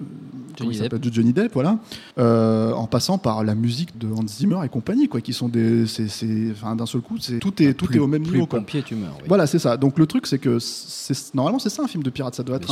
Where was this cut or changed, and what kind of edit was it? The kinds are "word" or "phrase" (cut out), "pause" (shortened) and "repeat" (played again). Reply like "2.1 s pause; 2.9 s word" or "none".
2.1 s pause; 3.9 s word; 7.4 s word